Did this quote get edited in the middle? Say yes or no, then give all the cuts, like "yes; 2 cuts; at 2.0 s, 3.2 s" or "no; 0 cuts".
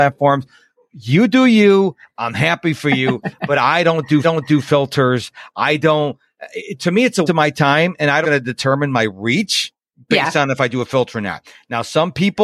yes; 4 cuts; at 4.2 s, 7.3 s, 8.2 s, 9.8 s